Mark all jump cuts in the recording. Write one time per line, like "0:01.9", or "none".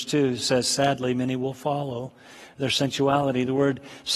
none